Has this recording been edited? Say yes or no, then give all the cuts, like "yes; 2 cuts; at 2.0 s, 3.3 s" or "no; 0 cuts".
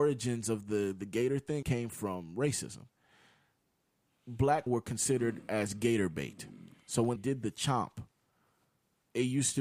yes; 3 cuts; at 1.6 s, 4.7 s, 7.2 s